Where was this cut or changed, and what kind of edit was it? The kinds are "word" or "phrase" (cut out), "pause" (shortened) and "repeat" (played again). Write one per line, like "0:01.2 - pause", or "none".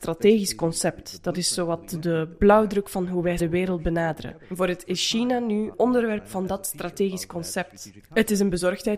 0:03.4 - word
0:04.8 - word
0:05.7 - word